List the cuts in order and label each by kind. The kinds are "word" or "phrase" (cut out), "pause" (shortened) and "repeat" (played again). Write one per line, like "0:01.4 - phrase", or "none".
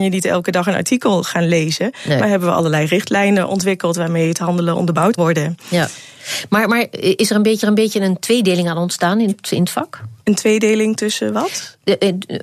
0:05.2 - word
0:07.6 - repeat
0:10.2 - pause